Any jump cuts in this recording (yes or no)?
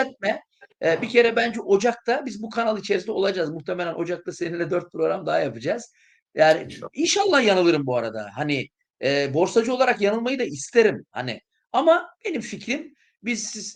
no